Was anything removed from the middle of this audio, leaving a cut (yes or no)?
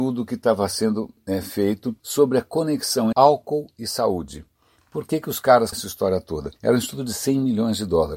yes